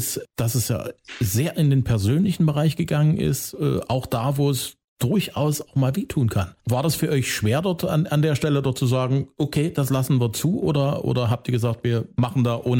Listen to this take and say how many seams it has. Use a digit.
1